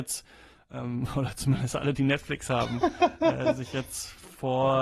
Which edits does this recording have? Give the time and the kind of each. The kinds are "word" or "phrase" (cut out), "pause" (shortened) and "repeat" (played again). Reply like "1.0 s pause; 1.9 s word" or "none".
none